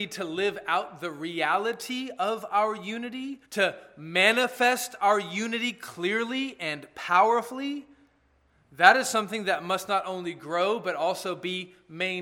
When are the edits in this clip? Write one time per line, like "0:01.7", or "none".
0:03.4